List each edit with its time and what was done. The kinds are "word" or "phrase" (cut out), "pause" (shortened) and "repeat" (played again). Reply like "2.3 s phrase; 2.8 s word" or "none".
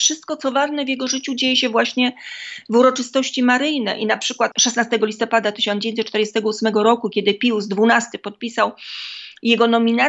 none

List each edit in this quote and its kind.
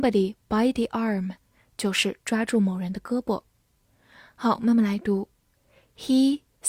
none

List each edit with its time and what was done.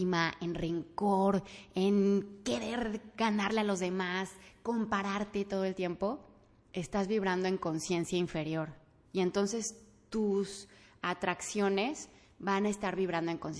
none

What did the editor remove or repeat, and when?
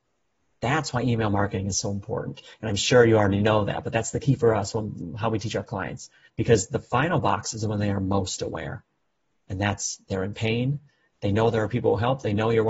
6.3 s pause

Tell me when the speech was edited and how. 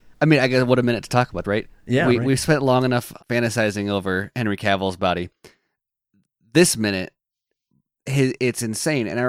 1.4 s word; 3.2 s word; 8.4 s word

